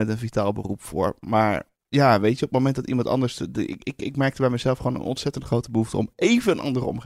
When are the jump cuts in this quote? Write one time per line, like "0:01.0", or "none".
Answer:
0:01.8